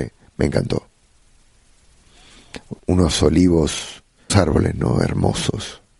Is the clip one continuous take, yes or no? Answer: no